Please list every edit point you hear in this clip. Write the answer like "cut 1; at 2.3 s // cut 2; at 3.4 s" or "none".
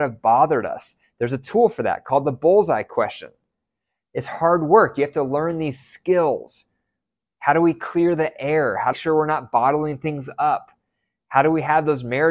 cut 1; at 8.9 s